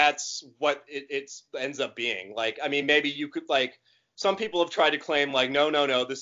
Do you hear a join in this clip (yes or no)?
no